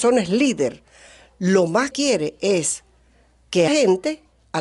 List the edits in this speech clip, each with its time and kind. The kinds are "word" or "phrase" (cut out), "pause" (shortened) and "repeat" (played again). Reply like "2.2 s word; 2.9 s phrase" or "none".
1.9 s word; 3.7 s word